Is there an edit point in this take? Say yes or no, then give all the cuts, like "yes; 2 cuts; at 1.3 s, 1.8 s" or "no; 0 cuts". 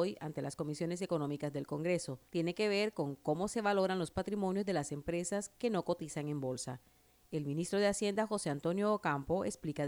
yes; 1 cut; at 2.3 s